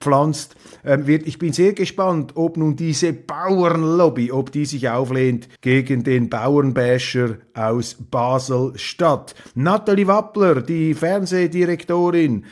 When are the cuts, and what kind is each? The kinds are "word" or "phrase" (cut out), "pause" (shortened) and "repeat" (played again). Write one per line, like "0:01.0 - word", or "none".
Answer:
0:05.6 - pause